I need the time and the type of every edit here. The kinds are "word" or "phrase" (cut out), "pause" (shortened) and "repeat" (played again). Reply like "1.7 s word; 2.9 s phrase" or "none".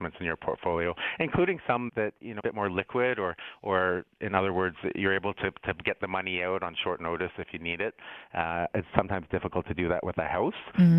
1.9 s word; 2.4 s phrase